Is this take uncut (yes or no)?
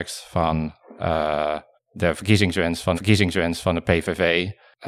no